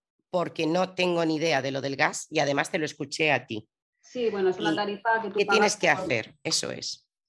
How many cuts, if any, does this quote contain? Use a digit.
0